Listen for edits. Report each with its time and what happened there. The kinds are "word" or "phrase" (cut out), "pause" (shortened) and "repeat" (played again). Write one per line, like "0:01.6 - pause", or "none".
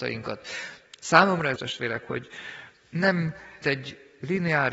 0:01.6 - phrase
0:03.6 - word